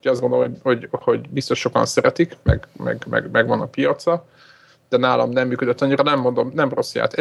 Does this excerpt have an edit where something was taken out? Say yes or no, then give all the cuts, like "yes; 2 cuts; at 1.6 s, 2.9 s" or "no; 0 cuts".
no; 0 cuts